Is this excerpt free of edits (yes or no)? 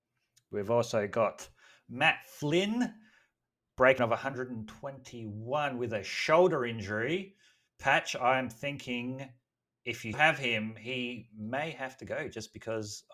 no